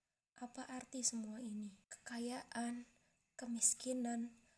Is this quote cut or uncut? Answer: cut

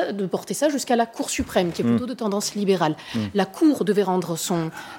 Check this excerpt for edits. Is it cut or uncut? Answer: uncut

